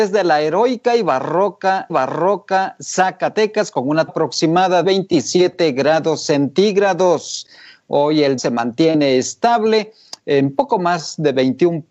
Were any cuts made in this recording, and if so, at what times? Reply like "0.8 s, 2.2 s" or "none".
1.9 s, 4.1 s, 4.8 s, 8.4 s